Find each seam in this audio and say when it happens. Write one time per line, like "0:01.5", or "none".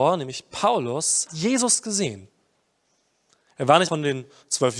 0:01.3
0:03.9